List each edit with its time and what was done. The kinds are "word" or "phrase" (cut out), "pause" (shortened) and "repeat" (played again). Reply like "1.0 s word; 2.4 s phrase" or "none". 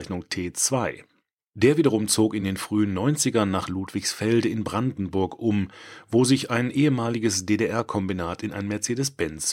none